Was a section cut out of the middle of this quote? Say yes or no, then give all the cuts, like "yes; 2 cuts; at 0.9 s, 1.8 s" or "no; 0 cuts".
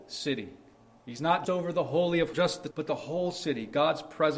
yes; 3 cuts; at 1.4 s, 2.3 s, 2.7 s